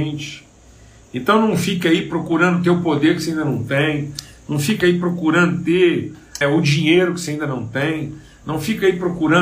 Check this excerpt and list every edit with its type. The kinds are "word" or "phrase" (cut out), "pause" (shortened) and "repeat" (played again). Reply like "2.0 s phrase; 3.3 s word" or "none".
6.4 s word